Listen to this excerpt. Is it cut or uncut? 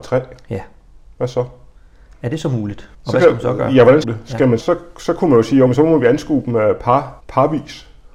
cut